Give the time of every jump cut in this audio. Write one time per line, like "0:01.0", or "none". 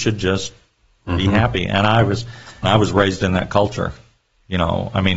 0:02.6